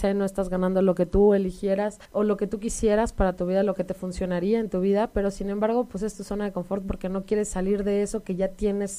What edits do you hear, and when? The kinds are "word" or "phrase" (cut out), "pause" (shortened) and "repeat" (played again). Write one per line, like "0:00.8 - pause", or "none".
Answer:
0:02.0 - pause

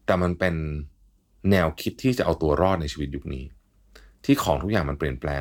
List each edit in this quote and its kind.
none

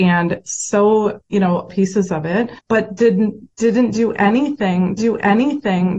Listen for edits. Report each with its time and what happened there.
0:01.2 - word
0:01.7 - phrase
0:02.6 - pause
0:03.5 - pause
0:05.0 - repeat

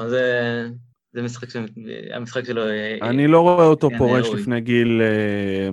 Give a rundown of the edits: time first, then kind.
0:00.9 - pause

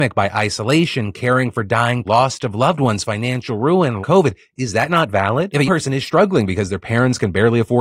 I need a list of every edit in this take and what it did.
0:02.0 - word
0:04.0 - word
0:05.7 - word

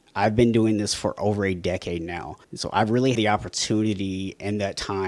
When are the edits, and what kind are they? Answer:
0:02.4 - pause
0:03.1 - word

